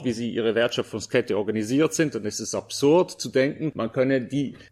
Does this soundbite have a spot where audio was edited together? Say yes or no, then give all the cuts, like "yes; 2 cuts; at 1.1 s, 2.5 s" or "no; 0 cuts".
no; 0 cuts